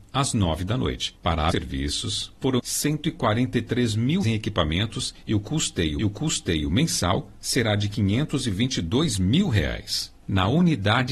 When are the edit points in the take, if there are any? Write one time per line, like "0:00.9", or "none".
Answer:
0:01.5
0:02.6
0:04.2
0:06.0